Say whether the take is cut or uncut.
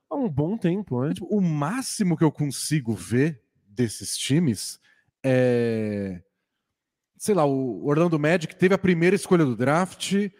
uncut